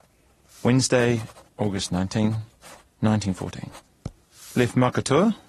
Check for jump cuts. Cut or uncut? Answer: uncut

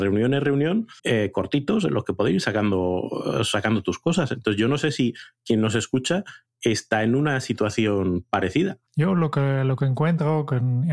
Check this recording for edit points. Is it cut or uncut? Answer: cut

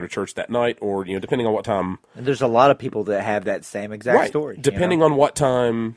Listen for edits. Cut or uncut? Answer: uncut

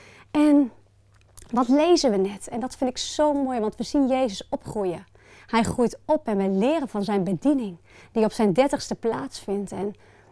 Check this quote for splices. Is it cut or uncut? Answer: uncut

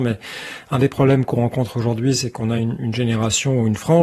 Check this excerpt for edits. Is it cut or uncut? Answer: uncut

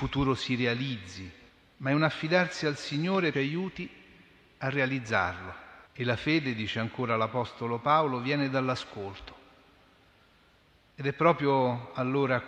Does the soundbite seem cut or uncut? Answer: cut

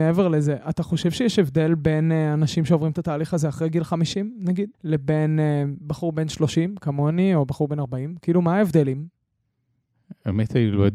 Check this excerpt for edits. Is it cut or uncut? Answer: cut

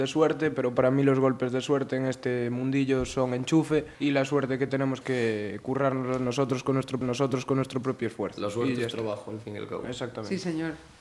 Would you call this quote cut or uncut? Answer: cut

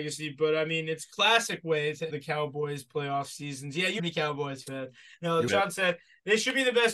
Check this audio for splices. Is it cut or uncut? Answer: cut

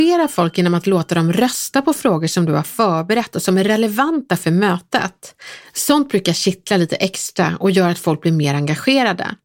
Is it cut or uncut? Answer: uncut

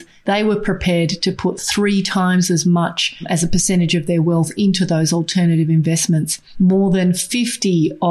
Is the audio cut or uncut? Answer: uncut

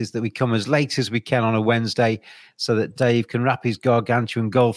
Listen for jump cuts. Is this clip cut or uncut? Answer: uncut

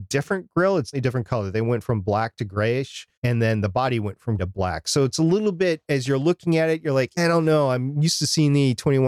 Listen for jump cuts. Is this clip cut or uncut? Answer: cut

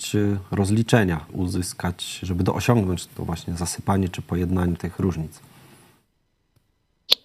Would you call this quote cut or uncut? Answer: cut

